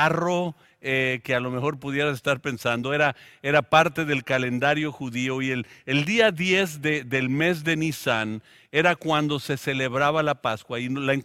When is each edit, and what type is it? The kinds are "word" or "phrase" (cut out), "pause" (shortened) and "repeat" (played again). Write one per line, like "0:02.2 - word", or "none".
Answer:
none